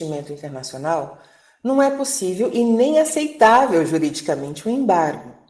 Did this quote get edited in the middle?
no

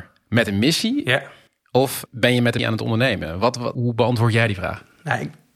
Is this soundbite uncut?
no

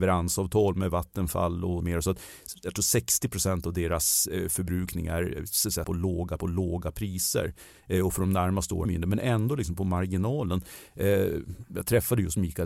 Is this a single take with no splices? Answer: no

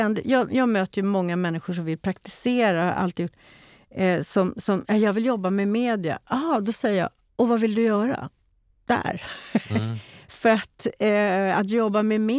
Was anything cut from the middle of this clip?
no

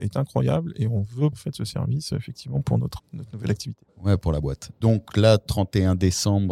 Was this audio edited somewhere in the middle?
yes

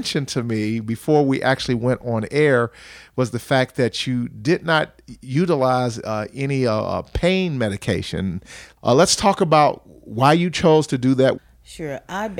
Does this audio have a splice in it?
no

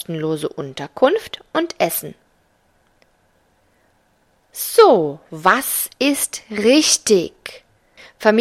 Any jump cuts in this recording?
no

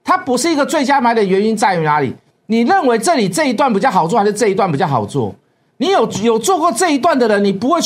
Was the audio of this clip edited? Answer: no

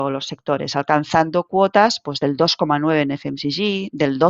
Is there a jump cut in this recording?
no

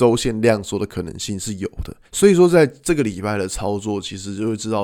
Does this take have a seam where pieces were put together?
yes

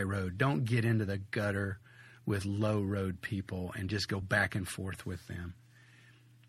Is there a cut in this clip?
no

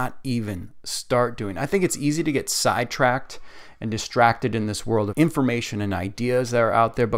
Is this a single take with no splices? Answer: no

